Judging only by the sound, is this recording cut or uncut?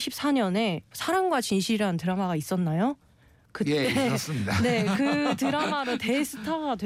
uncut